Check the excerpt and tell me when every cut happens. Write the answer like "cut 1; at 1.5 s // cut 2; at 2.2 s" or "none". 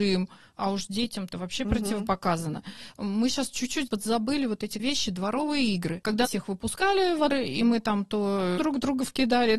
cut 1; at 1.3 s // cut 2; at 3.9 s // cut 3; at 4.8 s // cut 4; at 6.2 s // cut 5; at 7.3 s // cut 6; at 8.6 s